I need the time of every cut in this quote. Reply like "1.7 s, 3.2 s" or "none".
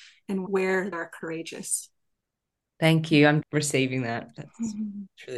0.9 s, 3.4 s